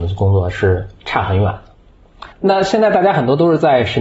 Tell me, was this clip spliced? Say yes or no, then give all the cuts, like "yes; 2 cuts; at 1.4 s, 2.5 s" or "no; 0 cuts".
yes; 1 cut; at 2.3 s